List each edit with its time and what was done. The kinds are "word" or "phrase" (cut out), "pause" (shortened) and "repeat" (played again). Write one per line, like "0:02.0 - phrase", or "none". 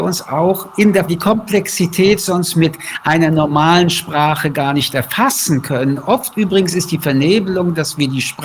0:01.1 - phrase